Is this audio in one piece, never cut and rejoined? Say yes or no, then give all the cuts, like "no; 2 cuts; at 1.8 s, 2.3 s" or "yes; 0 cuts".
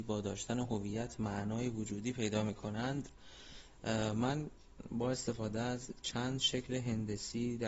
yes; 0 cuts